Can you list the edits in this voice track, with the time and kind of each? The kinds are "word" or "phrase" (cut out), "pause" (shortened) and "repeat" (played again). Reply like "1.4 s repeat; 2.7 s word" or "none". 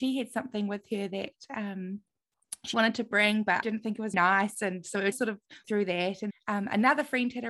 2.7 s word; 3.6 s word; 4.1 s word; 5.1 s word; 5.6 s word; 6.3 s word